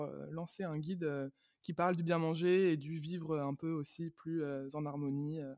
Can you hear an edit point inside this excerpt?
no; 0 cuts

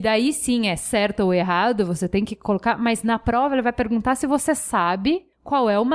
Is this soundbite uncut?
yes; 0 cuts

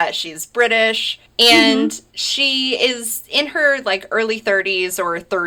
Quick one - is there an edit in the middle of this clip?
no; 0 cuts

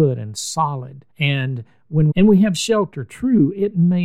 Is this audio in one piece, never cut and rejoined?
no; 2 cuts; at 1.1 s, 2.1 s

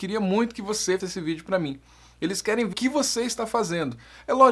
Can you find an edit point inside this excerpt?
yes; 2 cuts; at 1.0 s, 2.7 s

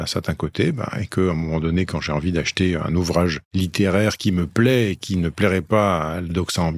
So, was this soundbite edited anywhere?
no; 0 cuts

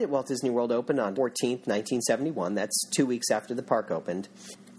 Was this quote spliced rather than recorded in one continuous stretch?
yes; 1 cut; at 1.1 s

